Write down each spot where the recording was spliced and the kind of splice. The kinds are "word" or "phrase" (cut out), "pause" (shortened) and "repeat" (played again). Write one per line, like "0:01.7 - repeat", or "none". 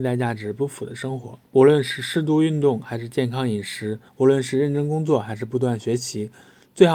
0:01.5 - pause
0:04.1 - pause